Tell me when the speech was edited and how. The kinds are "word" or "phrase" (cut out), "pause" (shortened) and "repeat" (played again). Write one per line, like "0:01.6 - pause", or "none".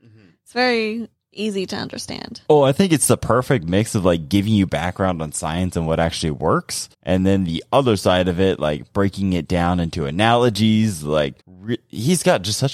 0:02.5 - pause
0:06.9 - pause
0:11.4 - pause